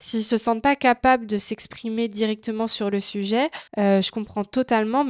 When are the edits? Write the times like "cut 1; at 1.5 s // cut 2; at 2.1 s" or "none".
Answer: cut 1; at 3.7 s